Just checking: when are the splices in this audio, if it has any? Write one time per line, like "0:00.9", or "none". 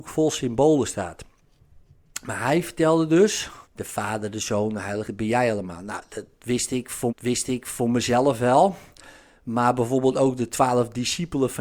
0:03.6
0:05.0
0:07.1